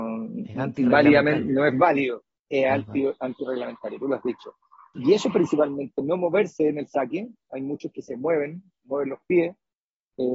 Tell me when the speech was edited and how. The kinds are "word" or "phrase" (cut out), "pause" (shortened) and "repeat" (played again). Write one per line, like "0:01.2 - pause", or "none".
none